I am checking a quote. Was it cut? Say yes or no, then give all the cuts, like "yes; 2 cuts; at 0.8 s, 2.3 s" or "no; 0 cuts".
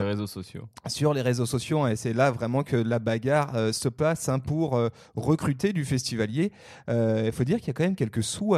no; 0 cuts